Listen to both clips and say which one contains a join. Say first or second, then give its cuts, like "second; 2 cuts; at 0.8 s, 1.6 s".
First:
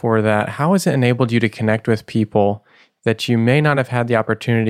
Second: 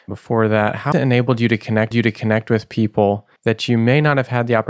second; 3 cuts; at 0.9 s, 1.9 s, 3.4 s